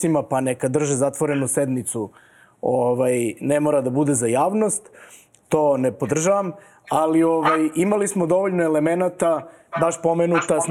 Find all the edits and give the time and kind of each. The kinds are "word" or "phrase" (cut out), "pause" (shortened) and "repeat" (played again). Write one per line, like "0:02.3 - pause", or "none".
none

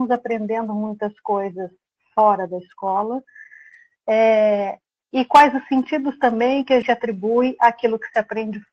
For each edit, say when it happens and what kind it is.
0:06.8 - word

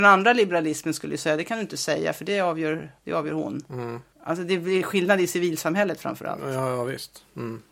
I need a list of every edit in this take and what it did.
0:03.0 - pause
0:04.1 - pause

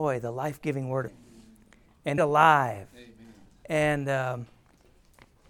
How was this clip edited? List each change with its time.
0:01.1 - phrase
0:02.2 - phrase

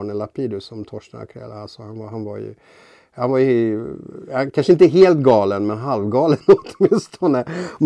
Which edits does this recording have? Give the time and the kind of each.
none

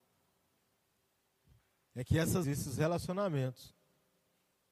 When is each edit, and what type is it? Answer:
0:02.4 - word

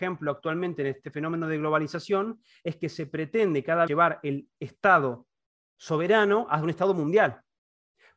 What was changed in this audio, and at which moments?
0:03.9 - word

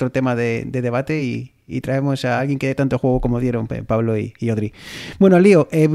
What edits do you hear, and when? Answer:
none

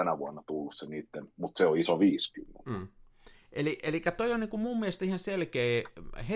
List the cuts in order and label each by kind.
none

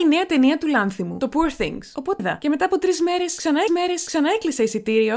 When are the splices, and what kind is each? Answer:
0:02.2 - phrase
0:03.7 - repeat

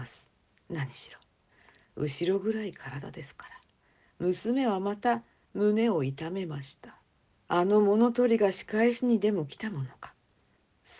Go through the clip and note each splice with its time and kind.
none

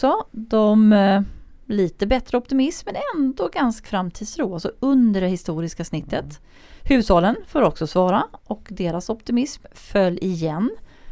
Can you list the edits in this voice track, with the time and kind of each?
0:03.8 - word

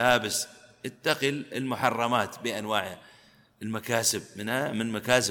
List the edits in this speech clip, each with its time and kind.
none

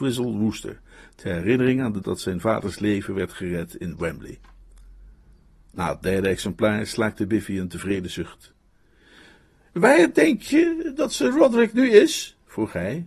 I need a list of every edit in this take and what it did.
0:02.0 - word

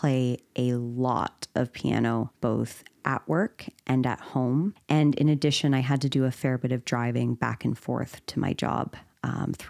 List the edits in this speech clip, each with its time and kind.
none

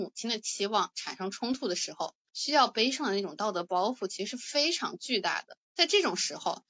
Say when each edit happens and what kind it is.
0:05.6 - pause

